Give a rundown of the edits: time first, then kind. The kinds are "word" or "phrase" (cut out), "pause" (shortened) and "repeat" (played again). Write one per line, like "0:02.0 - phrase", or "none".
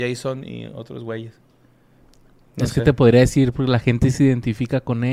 none